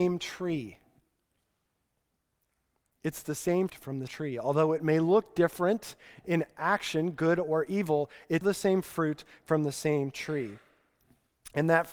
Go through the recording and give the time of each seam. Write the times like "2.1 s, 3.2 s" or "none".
3.7 s, 4.1 s, 8.4 s